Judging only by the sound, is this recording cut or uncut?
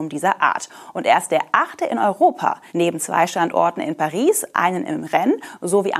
cut